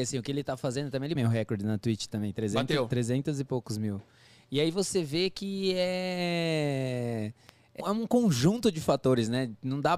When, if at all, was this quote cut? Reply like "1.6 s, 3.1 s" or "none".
1.2 s, 7.8 s